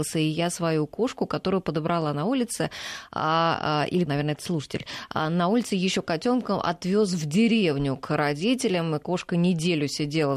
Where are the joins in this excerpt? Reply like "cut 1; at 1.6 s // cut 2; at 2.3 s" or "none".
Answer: cut 1; at 4.1 s